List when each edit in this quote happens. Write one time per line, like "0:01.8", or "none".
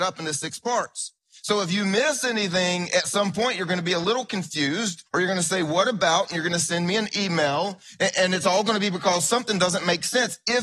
0:01.2
0:05.1